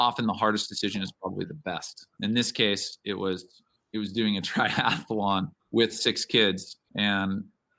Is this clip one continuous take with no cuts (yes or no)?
no